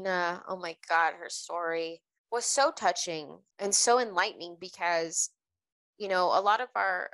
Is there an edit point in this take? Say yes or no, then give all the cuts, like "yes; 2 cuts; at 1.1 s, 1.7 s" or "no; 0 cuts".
yes; 1 cut; at 2.2 s